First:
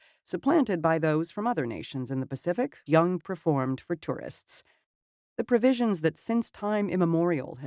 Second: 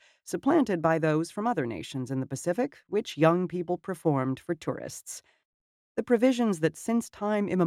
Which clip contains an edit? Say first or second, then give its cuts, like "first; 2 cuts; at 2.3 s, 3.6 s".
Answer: first; 2 cuts; at 2.9 s, 3.2 s